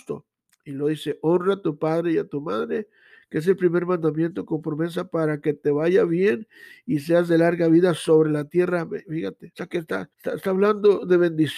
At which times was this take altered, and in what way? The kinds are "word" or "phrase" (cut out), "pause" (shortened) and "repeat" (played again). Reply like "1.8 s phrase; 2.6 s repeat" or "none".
9.5 s word; 10.1 s pause